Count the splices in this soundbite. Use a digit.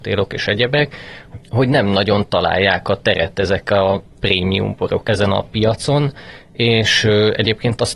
0